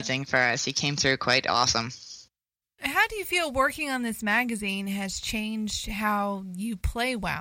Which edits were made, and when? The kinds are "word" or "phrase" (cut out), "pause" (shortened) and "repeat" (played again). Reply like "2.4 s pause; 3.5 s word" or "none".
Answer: none